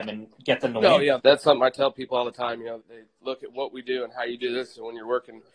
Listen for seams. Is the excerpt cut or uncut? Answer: cut